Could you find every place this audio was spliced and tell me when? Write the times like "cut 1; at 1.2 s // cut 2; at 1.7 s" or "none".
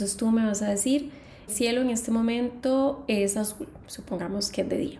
cut 1; at 1.5 s